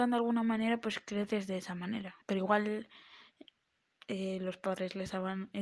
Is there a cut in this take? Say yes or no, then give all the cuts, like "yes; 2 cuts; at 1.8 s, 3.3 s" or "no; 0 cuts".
yes; 1 cut; at 2.2 s